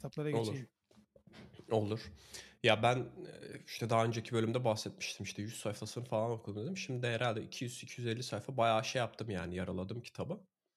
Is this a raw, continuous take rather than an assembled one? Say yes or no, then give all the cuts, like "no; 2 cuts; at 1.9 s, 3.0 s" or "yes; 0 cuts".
yes; 0 cuts